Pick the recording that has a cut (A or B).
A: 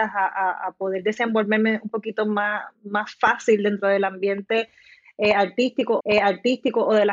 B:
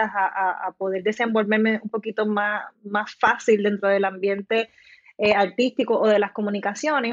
A